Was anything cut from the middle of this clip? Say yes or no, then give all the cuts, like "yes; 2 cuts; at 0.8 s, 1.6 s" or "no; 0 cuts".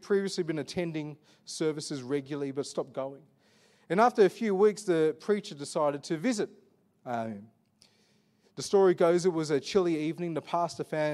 no; 0 cuts